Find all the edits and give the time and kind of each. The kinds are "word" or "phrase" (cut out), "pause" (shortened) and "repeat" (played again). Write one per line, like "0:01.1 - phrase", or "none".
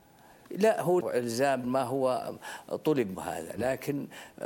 0:01.0 - word
0:01.6 - word
0:03.1 - word